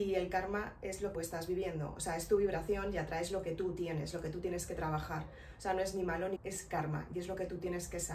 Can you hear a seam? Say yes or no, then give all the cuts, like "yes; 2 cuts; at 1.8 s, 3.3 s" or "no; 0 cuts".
yes; 2 cuts; at 1.1 s, 6.4 s